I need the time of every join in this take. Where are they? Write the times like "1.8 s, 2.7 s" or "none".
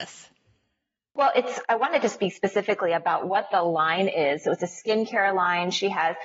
none

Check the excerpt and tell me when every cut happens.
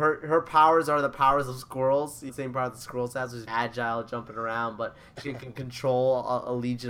2.3 s, 3.5 s, 5.2 s

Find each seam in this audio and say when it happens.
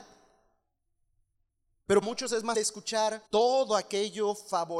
2.0 s, 2.5 s, 3.3 s

